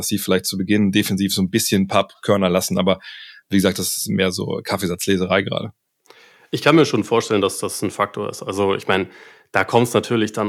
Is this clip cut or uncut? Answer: uncut